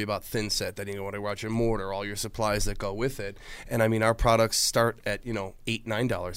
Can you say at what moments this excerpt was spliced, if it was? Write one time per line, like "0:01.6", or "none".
none